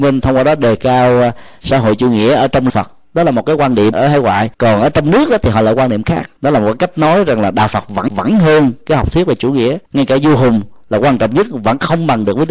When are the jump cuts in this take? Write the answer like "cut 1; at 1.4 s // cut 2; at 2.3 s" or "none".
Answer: cut 1; at 2.7 s // cut 2; at 3.9 s // cut 3; at 4.5 s // cut 4; at 6.4 s // cut 5; at 8.1 s // cut 6; at 9.9 s